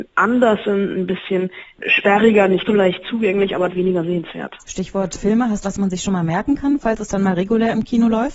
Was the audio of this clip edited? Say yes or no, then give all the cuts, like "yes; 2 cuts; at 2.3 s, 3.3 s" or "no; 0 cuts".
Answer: yes; 3 cuts; at 2.6 s, 3.7 s, 5.6 s